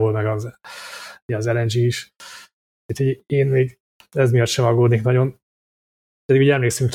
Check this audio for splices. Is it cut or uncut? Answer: uncut